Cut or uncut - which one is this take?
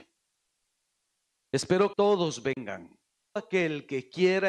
cut